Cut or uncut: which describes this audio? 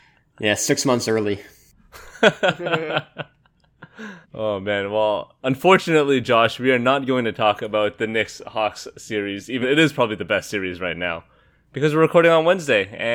cut